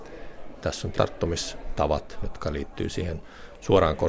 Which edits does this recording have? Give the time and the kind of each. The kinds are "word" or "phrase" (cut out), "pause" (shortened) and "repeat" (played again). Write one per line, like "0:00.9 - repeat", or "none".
0:00.9 - word

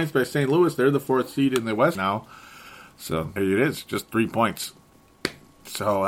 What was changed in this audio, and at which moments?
0:01.9 - word
0:03.4 - word

